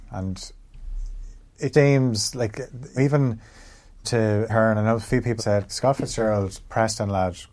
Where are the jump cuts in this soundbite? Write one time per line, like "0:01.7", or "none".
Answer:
0:01.7
0:03.0
0:04.0
0:04.5
0:05.4
0:05.7